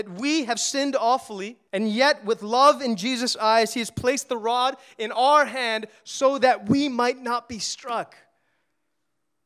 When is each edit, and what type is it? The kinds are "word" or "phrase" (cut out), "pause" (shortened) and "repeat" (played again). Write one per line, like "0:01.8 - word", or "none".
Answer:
0:01.7 - pause